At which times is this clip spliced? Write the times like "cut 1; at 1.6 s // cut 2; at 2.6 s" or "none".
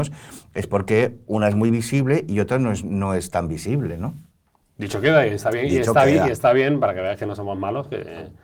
none